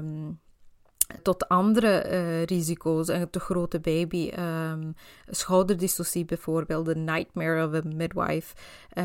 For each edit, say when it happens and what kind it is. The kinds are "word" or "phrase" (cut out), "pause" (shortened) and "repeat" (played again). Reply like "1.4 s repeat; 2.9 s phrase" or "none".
1.2 s word